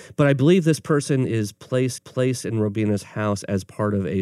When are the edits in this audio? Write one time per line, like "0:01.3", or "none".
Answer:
0:02.0

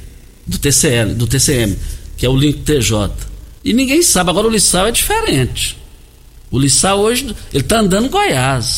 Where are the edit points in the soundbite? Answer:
0:03.6

